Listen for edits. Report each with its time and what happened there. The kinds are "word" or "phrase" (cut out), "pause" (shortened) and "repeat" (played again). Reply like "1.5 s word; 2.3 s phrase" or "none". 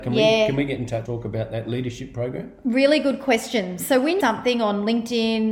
1.1 s word; 4.2 s phrase